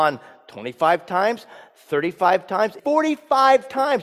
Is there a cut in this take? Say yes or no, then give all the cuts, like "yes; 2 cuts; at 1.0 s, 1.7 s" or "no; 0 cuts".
yes; 1 cut; at 2.8 s